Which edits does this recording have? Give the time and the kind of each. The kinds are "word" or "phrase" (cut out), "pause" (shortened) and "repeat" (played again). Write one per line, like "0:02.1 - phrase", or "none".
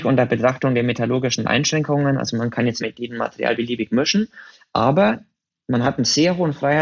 0:02.8 - phrase